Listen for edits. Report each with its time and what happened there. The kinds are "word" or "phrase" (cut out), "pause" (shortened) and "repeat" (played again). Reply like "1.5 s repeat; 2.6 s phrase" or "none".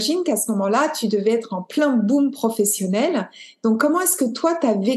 none